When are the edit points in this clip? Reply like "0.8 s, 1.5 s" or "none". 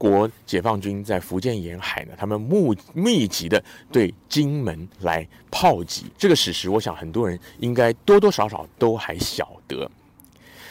4.9 s, 6.1 s

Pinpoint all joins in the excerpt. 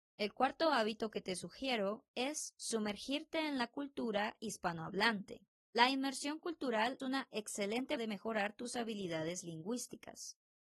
5.5 s, 7.0 s, 8.0 s

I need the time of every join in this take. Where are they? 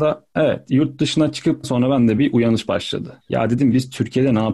1.6 s, 2.2 s, 3.2 s

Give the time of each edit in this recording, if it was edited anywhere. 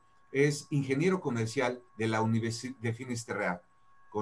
1.9 s, 2.8 s

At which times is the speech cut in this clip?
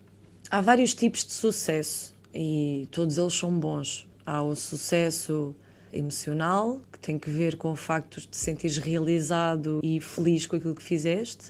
4.1 s, 5.9 s, 9.8 s

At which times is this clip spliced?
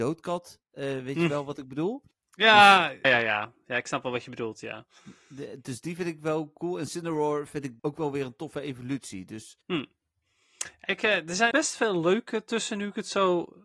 2.1 s, 3.0 s, 7.8 s, 9.6 s, 11.5 s

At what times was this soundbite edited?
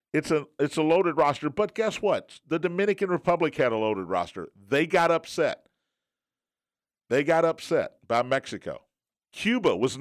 none

